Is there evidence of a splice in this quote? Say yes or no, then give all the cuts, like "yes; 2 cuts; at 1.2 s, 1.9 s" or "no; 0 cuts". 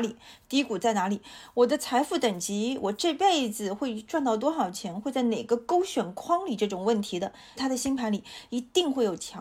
yes; 1 cut; at 7.6 s